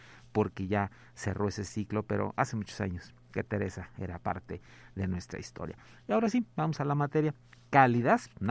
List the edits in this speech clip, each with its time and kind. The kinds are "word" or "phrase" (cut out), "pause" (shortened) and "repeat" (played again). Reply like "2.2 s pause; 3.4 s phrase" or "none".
none